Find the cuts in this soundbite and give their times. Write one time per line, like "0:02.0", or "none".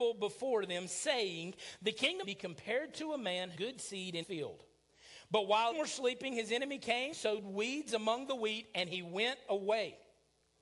0:02.2
0:03.5
0:04.2
0:05.7
0:07.1